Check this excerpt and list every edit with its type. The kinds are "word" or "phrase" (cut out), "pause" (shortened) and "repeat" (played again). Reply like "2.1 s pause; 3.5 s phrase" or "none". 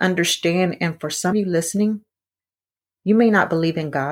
1.3 s word

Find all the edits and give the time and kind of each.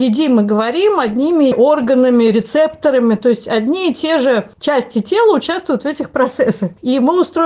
1.5 s phrase; 4.5 s pause

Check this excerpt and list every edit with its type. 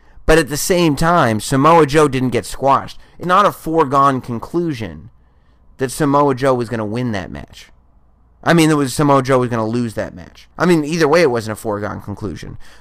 3.2 s word; 10.5 s pause

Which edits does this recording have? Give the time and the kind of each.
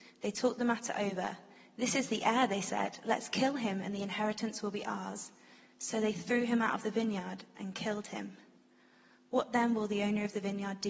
none

